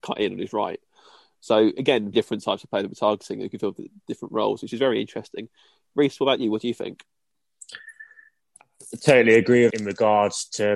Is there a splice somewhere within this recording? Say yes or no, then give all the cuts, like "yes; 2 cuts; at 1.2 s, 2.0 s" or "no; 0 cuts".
yes; 2 cuts; at 2.1 s, 9.7 s